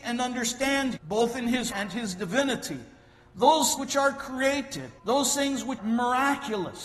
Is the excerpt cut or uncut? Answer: cut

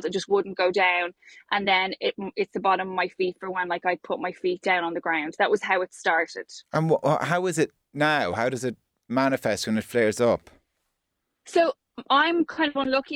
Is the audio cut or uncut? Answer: uncut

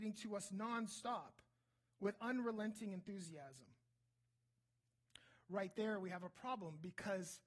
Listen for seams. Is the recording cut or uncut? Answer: uncut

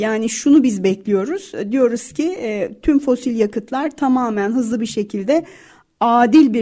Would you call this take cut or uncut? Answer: uncut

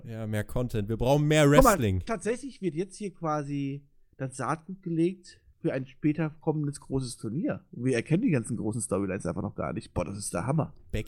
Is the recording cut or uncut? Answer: uncut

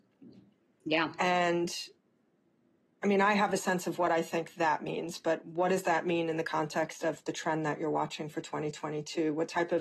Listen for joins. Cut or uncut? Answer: uncut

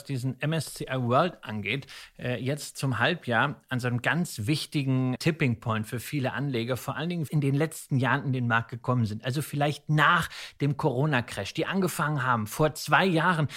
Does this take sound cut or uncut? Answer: cut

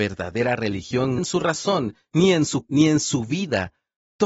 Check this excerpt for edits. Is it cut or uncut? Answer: cut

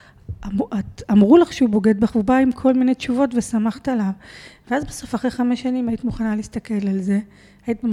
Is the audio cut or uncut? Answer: uncut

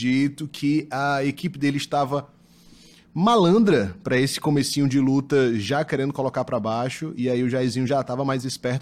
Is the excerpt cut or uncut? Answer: uncut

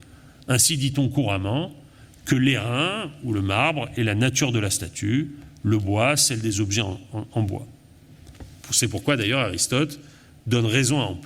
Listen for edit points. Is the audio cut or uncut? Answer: uncut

